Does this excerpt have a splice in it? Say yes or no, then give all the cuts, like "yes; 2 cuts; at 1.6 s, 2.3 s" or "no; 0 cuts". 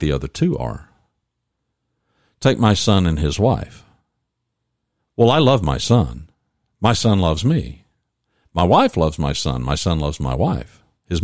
no; 0 cuts